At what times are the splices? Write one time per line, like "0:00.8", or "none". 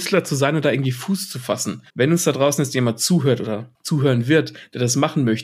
0:01.9
0:03.7